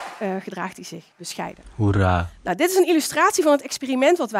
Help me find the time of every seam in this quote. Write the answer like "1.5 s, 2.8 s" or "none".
1.1 s